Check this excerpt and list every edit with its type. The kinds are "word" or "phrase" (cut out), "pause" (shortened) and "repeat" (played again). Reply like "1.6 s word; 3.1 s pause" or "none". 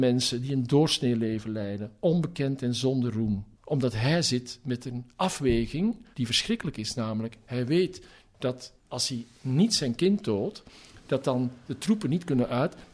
3.5 s pause; 6.1 s pause; 8.8 s pause; 9.3 s pause